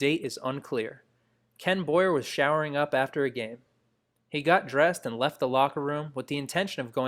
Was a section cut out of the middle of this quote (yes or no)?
no